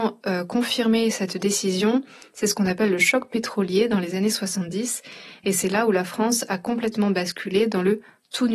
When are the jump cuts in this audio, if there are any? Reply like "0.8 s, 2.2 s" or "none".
none